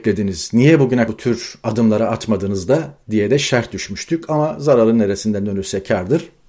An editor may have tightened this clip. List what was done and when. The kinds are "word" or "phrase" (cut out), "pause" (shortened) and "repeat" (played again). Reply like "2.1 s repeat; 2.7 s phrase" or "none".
1.1 s word